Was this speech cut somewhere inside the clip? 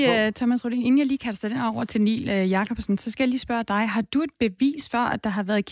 no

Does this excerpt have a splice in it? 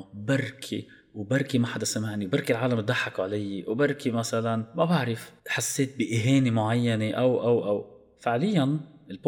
yes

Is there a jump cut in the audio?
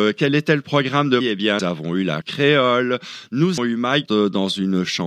yes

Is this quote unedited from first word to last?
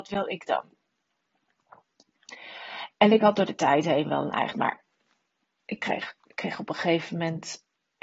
no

